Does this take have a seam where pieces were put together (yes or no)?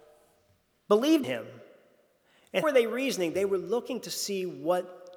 yes